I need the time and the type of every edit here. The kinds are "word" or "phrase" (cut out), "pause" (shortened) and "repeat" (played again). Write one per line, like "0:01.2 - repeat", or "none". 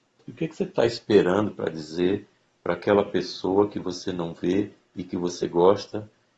none